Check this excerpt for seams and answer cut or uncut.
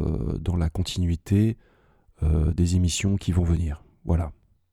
uncut